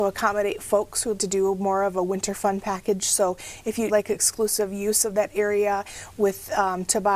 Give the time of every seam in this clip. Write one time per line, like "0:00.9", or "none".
0:01.2
0:03.9